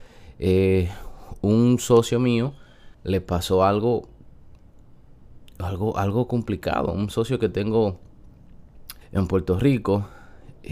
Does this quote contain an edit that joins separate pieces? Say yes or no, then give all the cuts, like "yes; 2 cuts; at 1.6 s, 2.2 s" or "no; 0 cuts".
yes; 2 cuts; at 2.9 s, 9.0 s